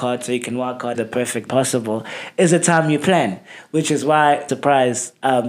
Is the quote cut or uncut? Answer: cut